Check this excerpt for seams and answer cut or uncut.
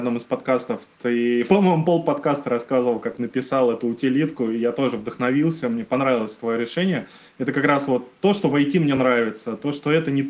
uncut